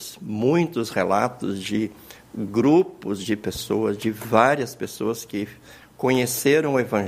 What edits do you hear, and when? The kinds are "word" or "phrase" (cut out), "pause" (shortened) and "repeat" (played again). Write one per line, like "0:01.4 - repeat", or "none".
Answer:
none